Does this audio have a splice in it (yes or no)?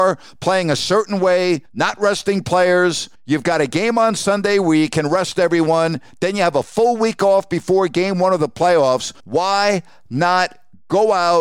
yes